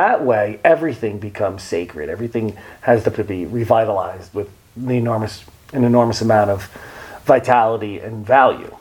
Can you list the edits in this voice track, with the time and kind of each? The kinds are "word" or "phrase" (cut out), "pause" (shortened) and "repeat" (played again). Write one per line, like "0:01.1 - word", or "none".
0:03.1 - word
0:04.3 - word
0:05.5 - pause